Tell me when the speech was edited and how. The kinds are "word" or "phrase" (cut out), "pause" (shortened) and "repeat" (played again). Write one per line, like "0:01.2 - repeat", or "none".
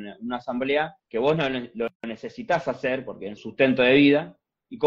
0:01.0 - pause
0:02.0 - pause
0:03.4 - phrase

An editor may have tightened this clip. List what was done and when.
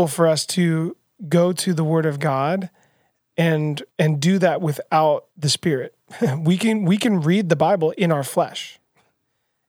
0:03.9 - pause
0:05.3 - pause

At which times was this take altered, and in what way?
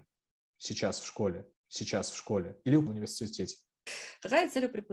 0:01.5 - repeat
0:02.9 - word

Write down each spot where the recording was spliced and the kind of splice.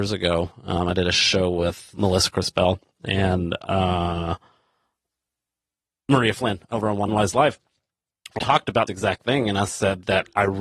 0:01.9 - word
0:07.1 - word
0:08.4 - word
0:08.9 - word

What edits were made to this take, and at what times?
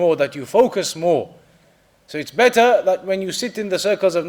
none

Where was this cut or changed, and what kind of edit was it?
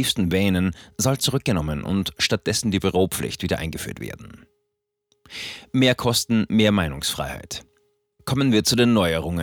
none

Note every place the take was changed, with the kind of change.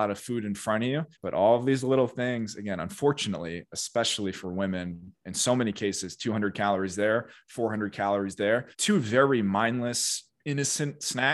0:01.1 - pause
0:08.7 - pause

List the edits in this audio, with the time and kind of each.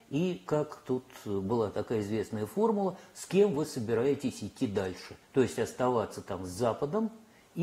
0:05.2 - pause

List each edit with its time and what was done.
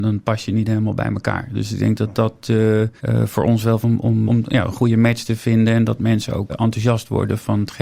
0:03.0 - pause
0:03.8 - phrase
0:04.3 - word
0:06.5 - word

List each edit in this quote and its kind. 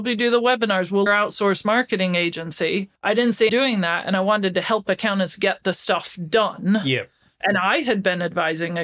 0:01.1 - phrase
0:03.0 - pause
0:03.5 - word

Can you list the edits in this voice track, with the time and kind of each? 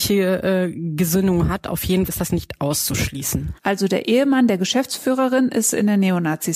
0:02.1 - word
0:03.6 - pause

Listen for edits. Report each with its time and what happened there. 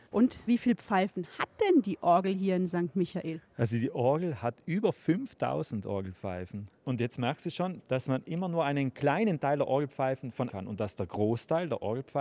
0:10.5 - phrase

